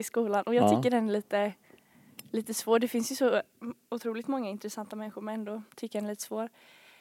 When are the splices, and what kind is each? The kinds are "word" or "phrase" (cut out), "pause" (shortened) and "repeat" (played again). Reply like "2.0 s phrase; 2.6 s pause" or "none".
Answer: 5.7 s pause